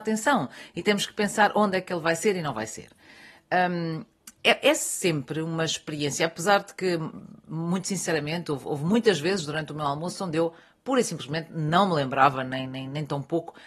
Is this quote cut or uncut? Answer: uncut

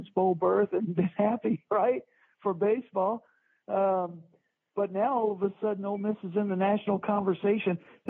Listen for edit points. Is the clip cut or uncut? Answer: uncut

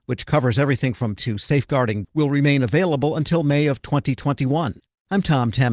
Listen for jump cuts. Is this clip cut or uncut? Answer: cut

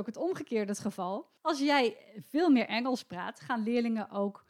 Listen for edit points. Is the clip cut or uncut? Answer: cut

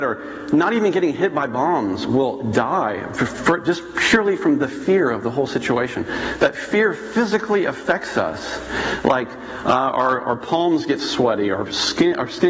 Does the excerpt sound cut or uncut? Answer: uncut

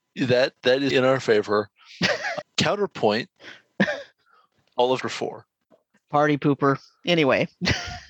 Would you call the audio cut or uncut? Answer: cut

